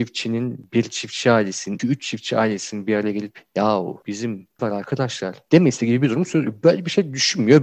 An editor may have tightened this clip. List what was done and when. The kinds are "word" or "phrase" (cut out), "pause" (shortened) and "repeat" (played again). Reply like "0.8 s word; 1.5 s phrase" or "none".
1.8 s word; 4.6 s word